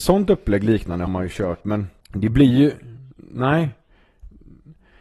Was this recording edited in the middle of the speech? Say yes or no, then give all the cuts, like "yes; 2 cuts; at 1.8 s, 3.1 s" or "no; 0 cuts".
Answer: yes; 3 cuts; at 1.1 s, 2.0 s, 3.1 s